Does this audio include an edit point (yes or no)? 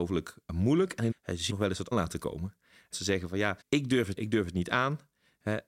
yes